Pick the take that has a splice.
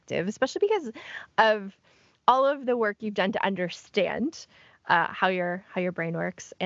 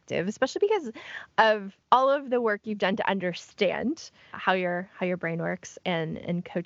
second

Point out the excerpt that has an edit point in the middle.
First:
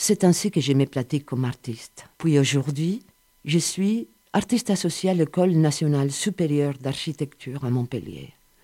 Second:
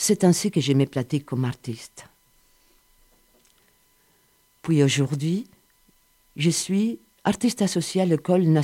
first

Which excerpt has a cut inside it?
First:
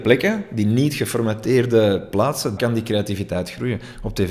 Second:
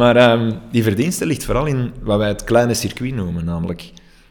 first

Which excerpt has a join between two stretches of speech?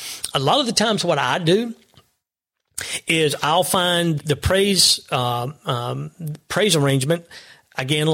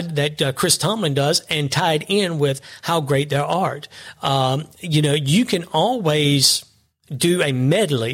first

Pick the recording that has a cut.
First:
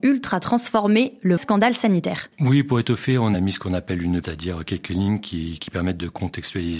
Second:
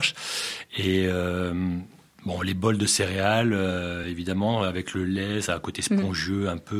first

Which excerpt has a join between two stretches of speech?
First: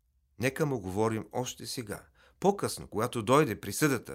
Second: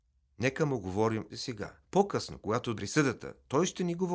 second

